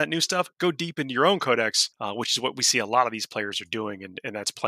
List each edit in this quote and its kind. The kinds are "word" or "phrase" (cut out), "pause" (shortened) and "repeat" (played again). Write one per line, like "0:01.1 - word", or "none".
0:01.9 - pause